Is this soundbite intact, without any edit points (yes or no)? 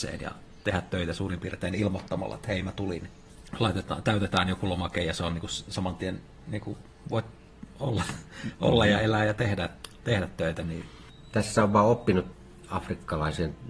yes